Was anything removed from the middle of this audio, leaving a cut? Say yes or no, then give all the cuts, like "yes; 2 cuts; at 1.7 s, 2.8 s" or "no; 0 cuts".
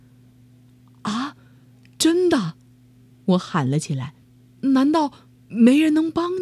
yes; 1 cut; at 4.2 s